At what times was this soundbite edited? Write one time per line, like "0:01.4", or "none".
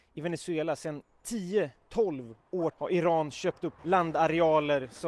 0:01.8
0:02.7
0:03.8

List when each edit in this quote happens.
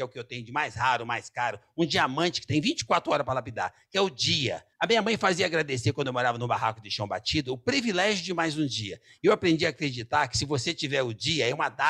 0:04.7

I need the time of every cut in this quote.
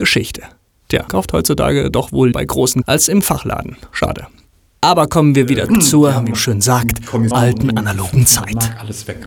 0:01.1
0:01.9
0:02.3
0:02.8
0:03.2
0:05.7
0:06.3
0:07.3

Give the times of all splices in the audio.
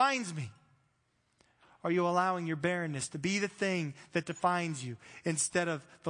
none

